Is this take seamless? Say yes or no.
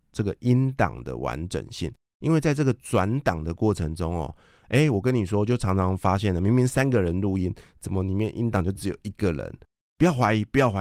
yes